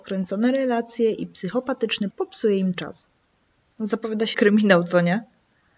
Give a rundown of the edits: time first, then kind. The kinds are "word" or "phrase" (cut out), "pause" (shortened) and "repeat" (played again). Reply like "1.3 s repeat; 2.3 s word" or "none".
2.1 s word; 2.7 s word; 4.3 s word